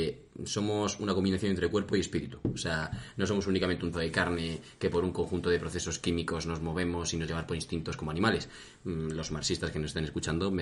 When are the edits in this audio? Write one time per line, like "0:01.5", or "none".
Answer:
0:03.9
0:07.3